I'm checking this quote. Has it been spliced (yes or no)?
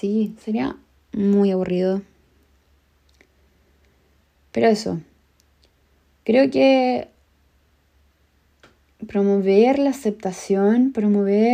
no